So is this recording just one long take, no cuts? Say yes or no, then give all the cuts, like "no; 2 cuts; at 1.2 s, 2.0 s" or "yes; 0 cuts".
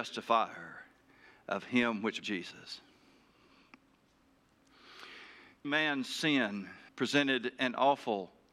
no; 3 cuts; at 2.2 s, 5.6 s, 6.9 s